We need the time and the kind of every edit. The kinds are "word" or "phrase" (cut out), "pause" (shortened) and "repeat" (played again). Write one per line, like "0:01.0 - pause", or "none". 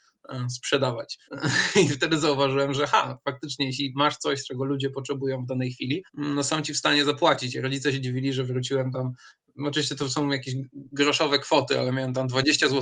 0:01.3 - pause
0:06.1 - pause